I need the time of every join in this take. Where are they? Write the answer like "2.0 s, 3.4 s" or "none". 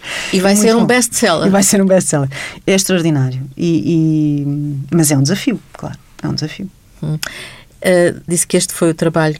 8.3 s